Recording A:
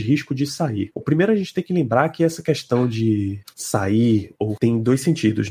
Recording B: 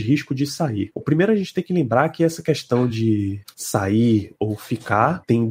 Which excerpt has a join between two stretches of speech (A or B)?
A